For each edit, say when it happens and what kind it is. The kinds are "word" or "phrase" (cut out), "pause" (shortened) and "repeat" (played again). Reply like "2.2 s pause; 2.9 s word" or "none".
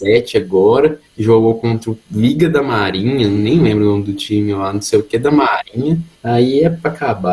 1.1 s pause; 6.1 s pause